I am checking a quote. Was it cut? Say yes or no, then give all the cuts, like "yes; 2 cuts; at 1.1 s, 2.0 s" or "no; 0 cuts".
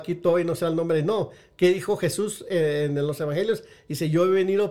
no; 0 cuts